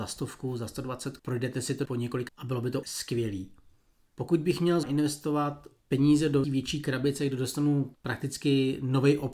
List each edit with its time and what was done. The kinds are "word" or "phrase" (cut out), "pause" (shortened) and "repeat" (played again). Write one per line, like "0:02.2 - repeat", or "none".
0:01.2 - word
0:01.9 - word
0:02.3 - word
0:02.8 - word
0:04.8 - word
0:06.4 - word